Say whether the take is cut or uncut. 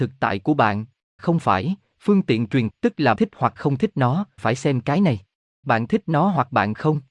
cut